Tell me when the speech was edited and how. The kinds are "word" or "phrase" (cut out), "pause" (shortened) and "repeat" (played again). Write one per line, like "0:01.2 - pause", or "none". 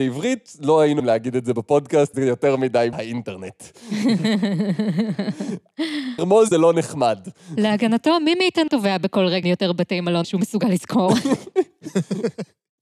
0:01.0 - word
0:02.1 - word
0:02.9 - word
0:06.2 - word
0:06.5 - word
0:08.7 - word
0:09.4 - word
0:10.2 - word